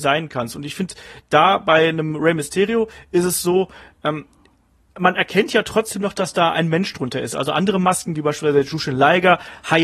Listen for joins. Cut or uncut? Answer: uncut